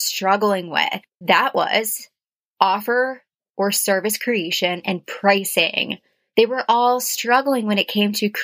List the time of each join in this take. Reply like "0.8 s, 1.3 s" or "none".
1.2 s